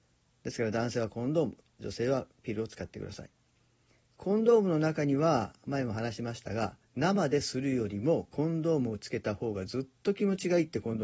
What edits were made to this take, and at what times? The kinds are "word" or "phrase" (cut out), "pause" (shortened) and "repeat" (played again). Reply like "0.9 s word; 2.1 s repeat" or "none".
6.8 s pause